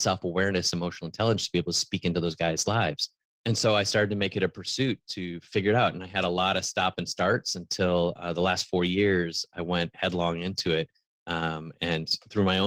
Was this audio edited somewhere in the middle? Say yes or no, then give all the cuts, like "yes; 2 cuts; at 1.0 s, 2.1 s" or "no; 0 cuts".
no; 0 cuts